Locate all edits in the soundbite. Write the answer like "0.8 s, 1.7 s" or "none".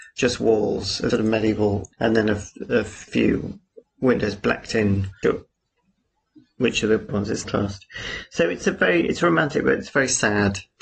1.1 s, 1.9 s, 3.1 s, 3.8 s, 5.2 s, 7.1 s, 7.4 s, 8.6 s